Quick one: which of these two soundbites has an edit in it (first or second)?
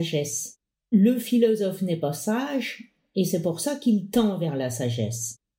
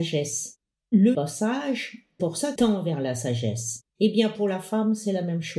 second